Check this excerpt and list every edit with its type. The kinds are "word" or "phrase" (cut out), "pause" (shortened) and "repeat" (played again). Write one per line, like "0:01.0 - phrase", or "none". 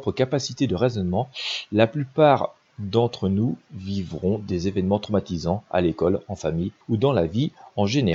0:06.8 - pause